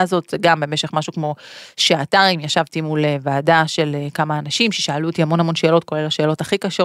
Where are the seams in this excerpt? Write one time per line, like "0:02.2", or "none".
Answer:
none